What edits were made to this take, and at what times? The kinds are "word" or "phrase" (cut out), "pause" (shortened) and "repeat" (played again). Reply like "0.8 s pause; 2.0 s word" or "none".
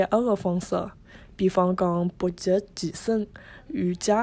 none